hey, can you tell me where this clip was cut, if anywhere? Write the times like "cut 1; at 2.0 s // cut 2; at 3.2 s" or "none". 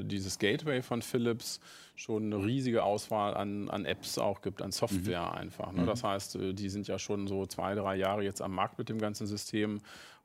none